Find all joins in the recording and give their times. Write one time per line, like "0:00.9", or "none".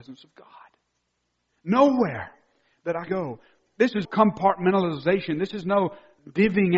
0:03.1
0:04.0